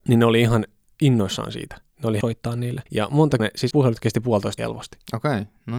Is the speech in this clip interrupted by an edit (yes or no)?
yes